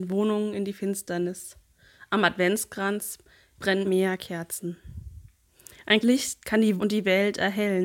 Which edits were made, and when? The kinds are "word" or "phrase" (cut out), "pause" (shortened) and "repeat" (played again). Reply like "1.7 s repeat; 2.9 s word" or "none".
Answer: 3.8 s word; 6.0 s word; 6.8 s word